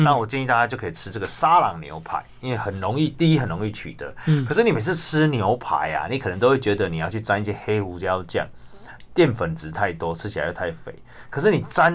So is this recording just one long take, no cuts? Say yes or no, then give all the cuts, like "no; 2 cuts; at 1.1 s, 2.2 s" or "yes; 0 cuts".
yes; 0 cuts